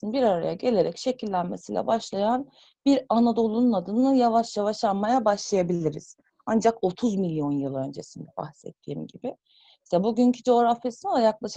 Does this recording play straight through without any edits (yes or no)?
yes